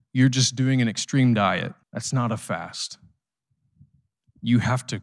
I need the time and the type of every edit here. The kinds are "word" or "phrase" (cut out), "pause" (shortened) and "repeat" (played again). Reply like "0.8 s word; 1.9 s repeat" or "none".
1.8 s pause